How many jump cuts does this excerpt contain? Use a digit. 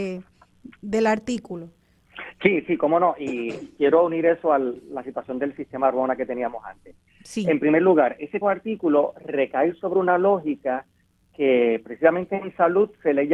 1